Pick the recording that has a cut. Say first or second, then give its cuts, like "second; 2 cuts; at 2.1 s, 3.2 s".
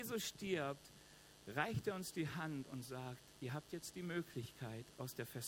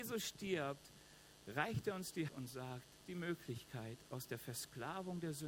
second; 2 cuts; at 2.3 s, 3.0 s